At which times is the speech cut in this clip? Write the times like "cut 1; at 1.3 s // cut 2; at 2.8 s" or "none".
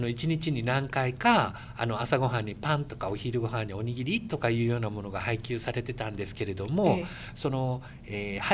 none

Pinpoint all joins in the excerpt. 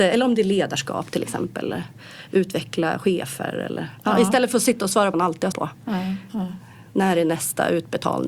cut 1; at 5.1 s // cut 2; at 5.5 s

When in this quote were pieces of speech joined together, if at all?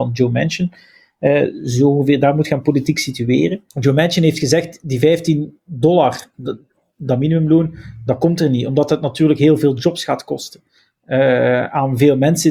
cut 1; at 3.7 s // cut 2; at 6.3 s

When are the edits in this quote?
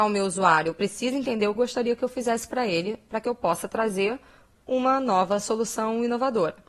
cut 1; at 1.6 s

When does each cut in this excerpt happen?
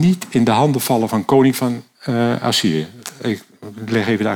none

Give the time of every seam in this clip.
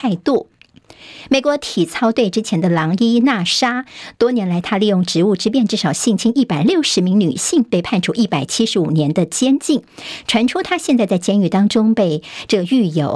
none

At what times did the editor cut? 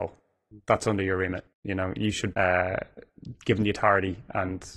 cut 1; at 1.5 s // cut 2; at 2.3 s

